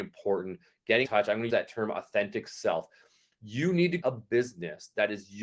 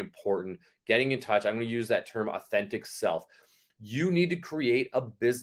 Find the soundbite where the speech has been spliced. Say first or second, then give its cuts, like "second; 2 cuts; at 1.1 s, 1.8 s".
first; 3 cuts; at 1.0 s, 1.5 s, 4.0 s